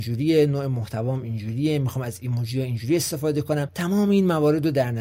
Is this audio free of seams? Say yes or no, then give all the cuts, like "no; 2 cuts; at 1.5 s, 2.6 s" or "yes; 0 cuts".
yes; 0 cuts